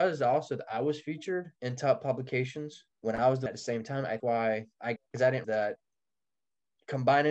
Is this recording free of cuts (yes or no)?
no